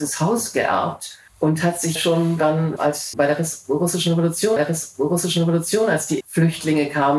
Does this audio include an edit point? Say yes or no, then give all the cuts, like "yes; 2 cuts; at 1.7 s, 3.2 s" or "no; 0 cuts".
yes; 6 cuts; at 1.3 s, 2.0 s, 2.8 s, 3.1 s, 4.6 s, 6.2 s